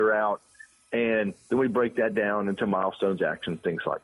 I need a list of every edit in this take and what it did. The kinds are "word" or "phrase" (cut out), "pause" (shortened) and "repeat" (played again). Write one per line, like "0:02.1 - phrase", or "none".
none